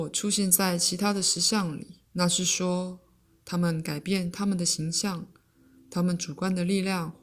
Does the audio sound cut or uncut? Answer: cut